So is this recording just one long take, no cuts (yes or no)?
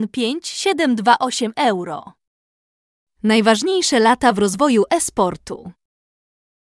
yes